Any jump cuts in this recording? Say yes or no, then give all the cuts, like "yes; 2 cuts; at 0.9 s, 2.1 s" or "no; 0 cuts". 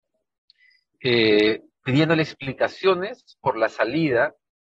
no; 0 cuts